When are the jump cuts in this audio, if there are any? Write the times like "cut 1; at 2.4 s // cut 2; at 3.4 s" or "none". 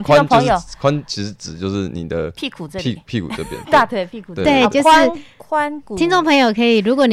none